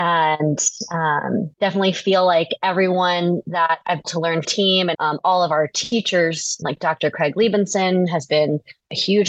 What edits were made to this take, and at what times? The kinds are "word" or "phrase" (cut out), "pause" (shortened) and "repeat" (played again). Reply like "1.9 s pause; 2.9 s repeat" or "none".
1.5 s pause; 4.0 s phrase; 4.4 s phrase; 4.9 s word; 6.6 s word